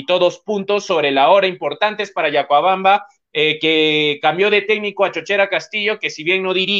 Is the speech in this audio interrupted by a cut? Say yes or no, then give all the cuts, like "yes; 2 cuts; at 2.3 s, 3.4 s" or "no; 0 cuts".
no; 0 cuts